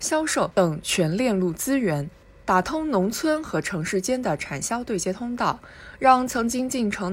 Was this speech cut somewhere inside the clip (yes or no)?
no